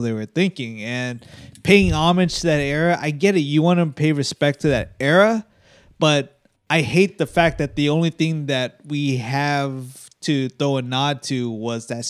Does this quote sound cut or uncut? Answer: uncut